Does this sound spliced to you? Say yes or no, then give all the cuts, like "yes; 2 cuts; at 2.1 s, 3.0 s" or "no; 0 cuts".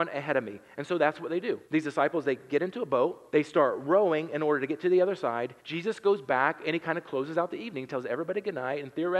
yes; 3 cuts; at 1.6 s, 3.3 s, 5.6 s